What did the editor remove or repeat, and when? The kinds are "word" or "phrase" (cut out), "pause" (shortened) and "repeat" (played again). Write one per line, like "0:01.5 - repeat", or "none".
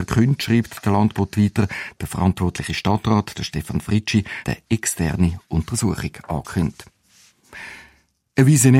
0:04.4 - word